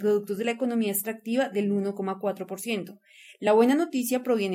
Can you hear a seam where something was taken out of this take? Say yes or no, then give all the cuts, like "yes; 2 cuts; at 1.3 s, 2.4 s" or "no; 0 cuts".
no; 0 cuts